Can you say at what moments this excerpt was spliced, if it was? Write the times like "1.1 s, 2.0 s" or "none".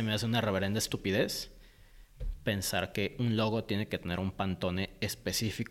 none